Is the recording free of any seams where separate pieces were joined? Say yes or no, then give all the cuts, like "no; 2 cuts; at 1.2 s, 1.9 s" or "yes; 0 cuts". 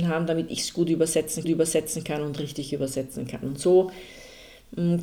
no; 1 cut; at 1.4 s